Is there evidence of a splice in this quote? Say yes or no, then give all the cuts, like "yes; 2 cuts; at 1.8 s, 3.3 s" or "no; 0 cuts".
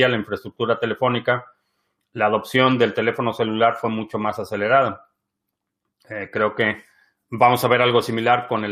no; 0 cuts